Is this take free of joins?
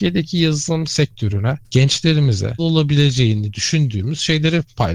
no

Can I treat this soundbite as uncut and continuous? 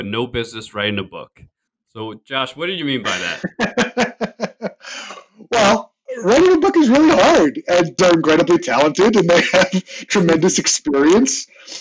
no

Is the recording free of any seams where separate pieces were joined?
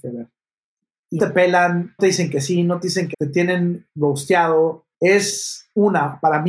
no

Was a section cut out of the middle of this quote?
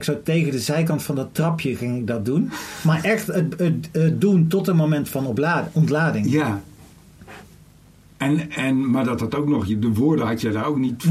no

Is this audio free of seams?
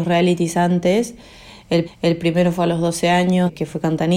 no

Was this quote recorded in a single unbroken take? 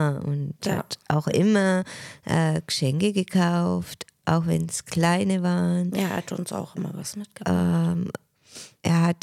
yes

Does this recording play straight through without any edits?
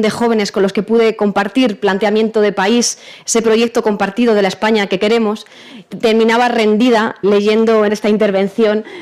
no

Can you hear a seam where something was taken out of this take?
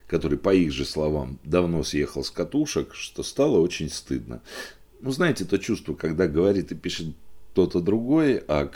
no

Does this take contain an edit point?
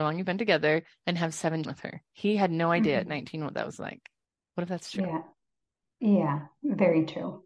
yes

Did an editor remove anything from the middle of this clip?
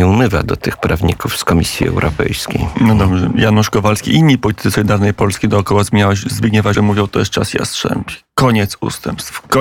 yes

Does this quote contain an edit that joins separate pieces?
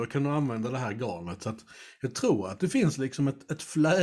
no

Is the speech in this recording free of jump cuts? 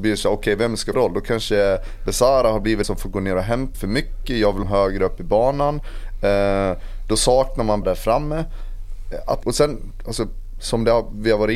no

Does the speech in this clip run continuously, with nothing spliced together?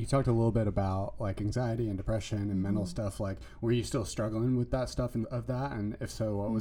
no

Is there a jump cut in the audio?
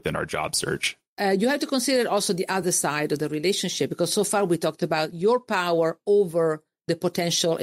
no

